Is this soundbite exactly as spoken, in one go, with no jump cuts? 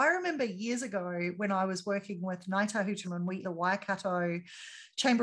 no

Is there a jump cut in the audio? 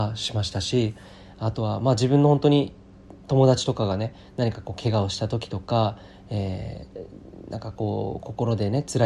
no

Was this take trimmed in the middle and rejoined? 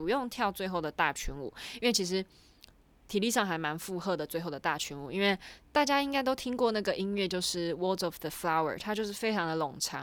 no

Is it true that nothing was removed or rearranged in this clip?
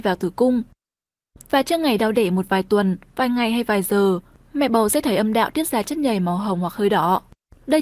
yes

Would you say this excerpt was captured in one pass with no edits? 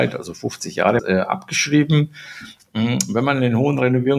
no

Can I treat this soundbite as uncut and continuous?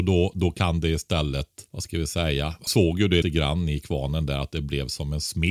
no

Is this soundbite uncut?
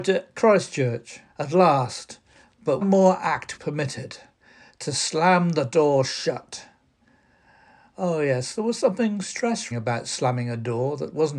no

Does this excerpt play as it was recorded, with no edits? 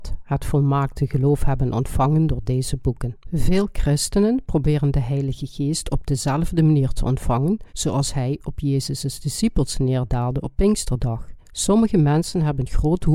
no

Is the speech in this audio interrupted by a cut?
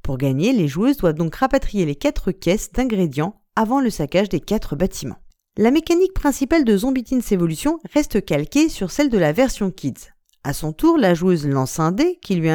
no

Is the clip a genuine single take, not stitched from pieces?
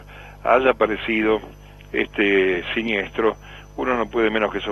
yes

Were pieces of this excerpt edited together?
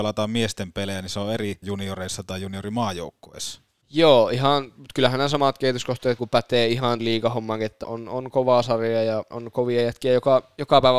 yes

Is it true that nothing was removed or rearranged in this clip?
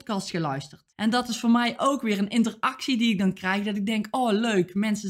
no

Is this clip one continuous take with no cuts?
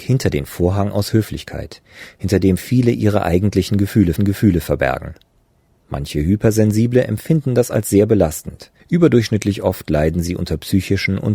no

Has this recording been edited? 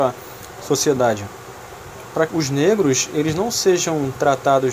yes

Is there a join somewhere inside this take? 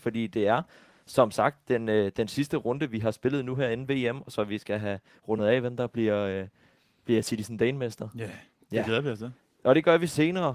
no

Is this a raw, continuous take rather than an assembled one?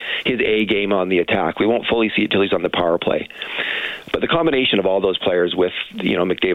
yes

